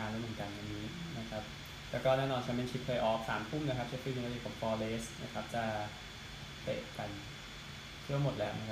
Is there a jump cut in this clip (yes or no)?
no